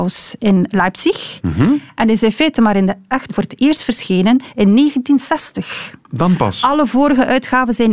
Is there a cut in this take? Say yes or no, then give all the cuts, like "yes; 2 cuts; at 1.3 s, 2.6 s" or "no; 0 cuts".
yes; 2 cuts; at 3.3 s, 6.0 s